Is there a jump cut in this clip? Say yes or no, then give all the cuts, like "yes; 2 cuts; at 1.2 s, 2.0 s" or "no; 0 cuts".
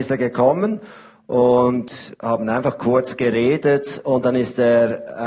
no; 0 cuts